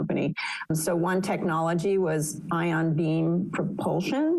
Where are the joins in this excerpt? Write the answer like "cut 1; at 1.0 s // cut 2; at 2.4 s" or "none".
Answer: none